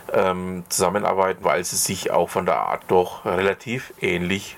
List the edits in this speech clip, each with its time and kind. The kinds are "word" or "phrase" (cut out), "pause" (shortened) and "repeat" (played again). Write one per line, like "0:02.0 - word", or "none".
0:01.4 - word
0:02.0 - word
0:02.8 - word

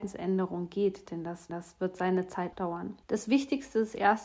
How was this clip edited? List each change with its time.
0:01.5 - repeat
0:02.5 - word
0:03.0 - pause

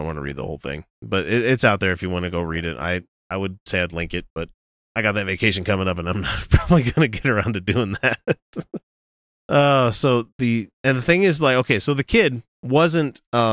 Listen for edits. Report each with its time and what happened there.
0:04.8 - pause
0:08.8 - pause
0:10.7 - pause
0:12.5 - pause

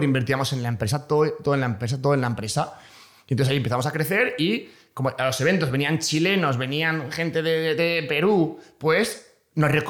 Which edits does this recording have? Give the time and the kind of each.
none

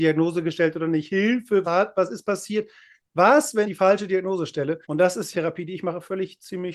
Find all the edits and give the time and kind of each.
0:01.6 - word
0:03.6 - word
0:04.8 - pause
0:05.3 - phrase

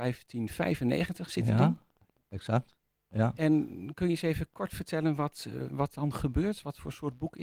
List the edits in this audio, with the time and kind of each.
none

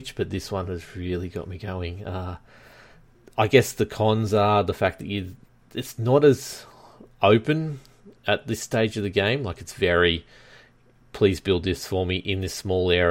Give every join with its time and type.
none

